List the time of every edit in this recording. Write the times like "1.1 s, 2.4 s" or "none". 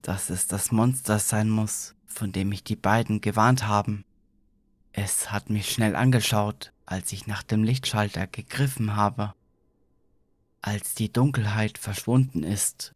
none